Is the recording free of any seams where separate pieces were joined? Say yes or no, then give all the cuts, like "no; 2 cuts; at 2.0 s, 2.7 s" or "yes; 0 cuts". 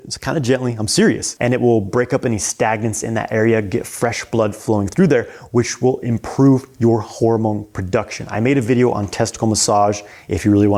yes; 0 cuts